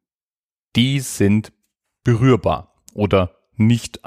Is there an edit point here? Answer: no; 0 cuts

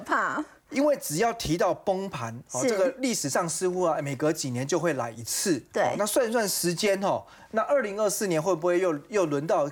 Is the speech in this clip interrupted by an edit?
no; 0 cuts

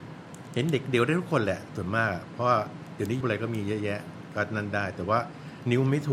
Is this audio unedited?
no; 1 cut; at 3.2 s

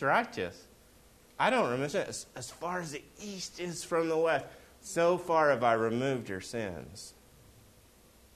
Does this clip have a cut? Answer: no; 0 cuts

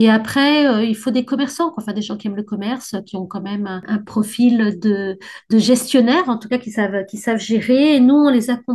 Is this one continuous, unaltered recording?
yes; 0 cuts

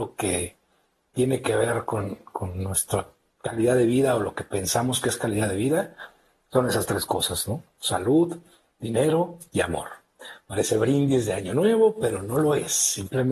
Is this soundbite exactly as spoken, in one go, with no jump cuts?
yes; 0 cuts

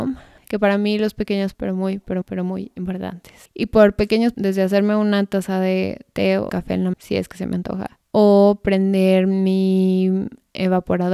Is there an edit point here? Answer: yes; 5 cuts; at 1.5 s, 2.2 s, 4.3 s, 6.5 s, 6.9 s

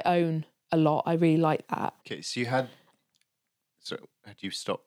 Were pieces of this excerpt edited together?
yes; 1 cut; at 2.0 s

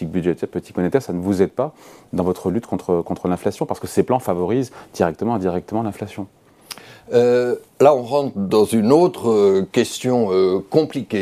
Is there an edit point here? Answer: yes; 1 cut; at 7.7 s

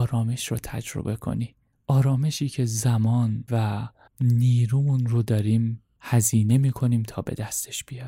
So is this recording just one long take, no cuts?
no; 3 cuts; at 1.7 s, 3.5 s, 4.1 s

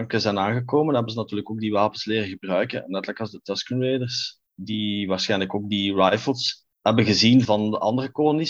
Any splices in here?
yes; 3 cuts; at 4.5 s, 6.7 s, 7.4 s

